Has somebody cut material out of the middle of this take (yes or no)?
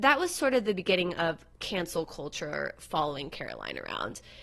no